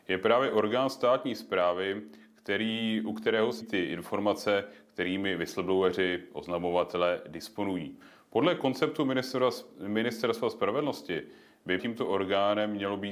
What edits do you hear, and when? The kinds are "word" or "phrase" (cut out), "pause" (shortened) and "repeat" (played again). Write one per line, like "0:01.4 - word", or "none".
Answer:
0:03.6 - word
0:11.8 - word